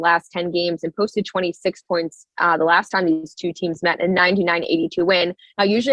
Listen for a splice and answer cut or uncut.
uncut